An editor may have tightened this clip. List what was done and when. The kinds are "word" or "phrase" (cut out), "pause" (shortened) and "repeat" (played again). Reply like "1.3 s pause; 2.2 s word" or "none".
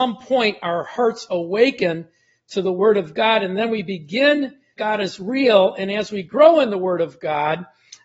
4.8 s phrase